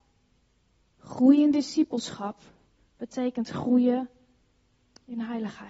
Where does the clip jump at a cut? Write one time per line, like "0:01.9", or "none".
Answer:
none